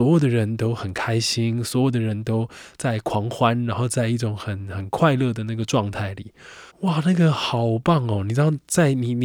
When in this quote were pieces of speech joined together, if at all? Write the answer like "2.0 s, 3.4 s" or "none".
6.7 s